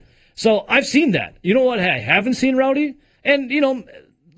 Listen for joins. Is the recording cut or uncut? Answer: uncut